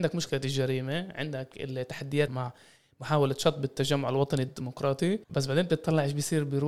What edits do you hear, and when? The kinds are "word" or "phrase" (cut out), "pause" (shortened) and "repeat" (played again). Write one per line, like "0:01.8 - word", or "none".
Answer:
0:02.3 - word
0:05.2 - pause